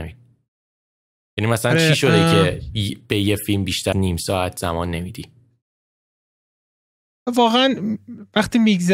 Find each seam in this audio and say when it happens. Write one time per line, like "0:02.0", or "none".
0:03.9

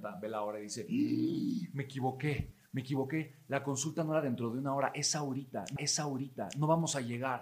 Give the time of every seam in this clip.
0:05.8

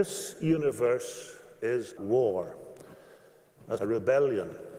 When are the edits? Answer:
0:02.0
0:03.8

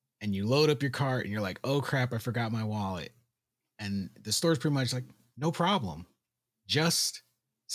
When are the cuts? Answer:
none

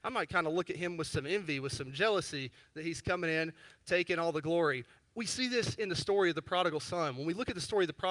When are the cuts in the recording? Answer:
none

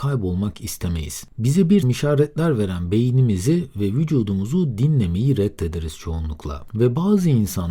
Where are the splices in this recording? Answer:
0:01.8

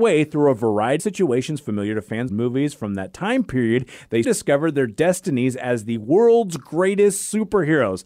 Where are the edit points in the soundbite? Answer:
0:01.0
0:02.3
0:04.2

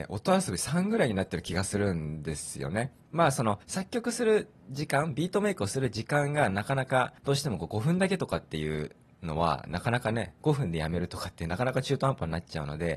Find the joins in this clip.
0:03.0
0:03.6
0:07.2

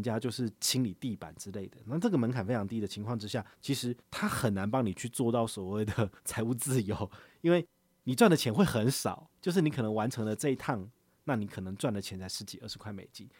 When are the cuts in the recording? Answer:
0:03.5
0:04.0
0:06.2
0:09.3

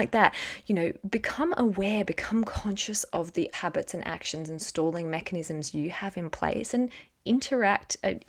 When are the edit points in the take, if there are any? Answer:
0:03.5

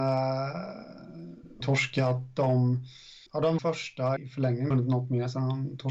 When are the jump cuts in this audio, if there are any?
0:01.6
0:03.3
0:03.6
0:04.2
0:04.7

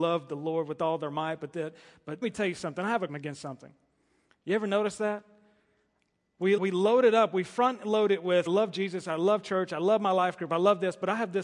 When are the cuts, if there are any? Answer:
0:02.2
0:03.1
0:06.6
0:08.5

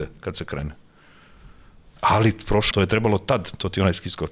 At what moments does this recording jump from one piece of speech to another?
0:02.7

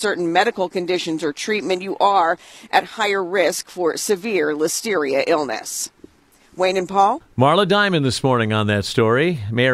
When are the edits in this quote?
none

